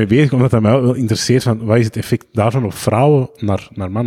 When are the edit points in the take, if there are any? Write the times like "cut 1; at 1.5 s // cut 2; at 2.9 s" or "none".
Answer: none